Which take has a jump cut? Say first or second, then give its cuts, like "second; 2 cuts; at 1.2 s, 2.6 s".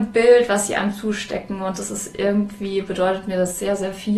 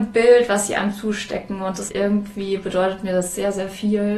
second; 1 cut; at 1.9 s